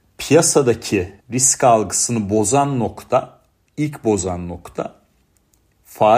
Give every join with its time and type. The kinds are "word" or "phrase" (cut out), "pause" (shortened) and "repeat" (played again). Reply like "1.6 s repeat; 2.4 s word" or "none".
1.2 s pause